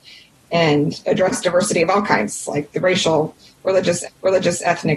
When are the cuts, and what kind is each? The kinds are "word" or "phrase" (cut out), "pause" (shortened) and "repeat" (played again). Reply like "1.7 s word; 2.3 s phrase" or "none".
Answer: 4.0 s repeat